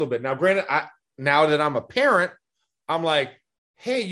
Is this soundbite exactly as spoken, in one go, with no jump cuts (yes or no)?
yes